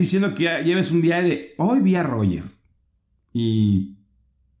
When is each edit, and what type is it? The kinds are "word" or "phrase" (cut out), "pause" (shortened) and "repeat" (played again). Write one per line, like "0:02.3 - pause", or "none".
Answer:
none